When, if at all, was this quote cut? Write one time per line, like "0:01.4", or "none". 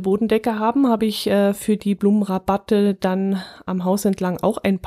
none